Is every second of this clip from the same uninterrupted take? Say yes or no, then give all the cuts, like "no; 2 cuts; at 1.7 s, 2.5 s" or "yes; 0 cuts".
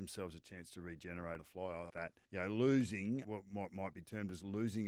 no; 4 cuts; at 1.4 s, 1.9 s, 2.3 s, 3.2 s